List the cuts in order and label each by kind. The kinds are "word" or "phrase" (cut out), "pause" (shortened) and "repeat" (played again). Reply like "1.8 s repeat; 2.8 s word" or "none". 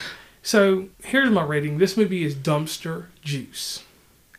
0.9 s pause